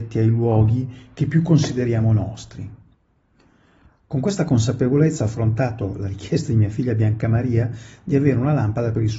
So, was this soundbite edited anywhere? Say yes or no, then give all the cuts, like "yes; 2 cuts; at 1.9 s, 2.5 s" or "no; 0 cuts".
no; 0 cuts